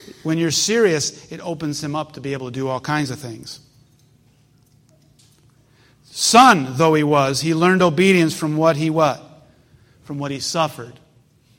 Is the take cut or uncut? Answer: uncut